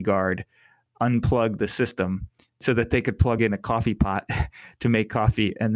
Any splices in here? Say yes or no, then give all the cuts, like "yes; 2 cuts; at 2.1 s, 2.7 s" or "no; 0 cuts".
no; 0 cuts